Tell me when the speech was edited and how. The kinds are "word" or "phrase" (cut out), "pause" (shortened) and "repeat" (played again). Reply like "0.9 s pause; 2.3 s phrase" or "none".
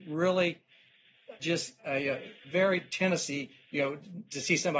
1.4 s word; 1.8 s pause